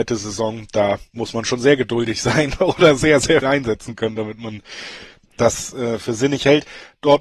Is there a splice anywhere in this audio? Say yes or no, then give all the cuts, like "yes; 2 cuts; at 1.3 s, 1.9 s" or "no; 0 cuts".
yes; 1 cut; at 3.4 s